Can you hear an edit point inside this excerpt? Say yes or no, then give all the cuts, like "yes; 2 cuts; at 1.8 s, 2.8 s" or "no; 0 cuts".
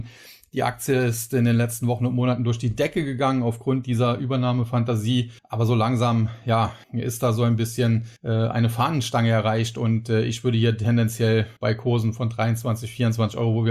yes; 4 cuts; at 5.4 s, 6.8 s, 8.2 s, 11.6 s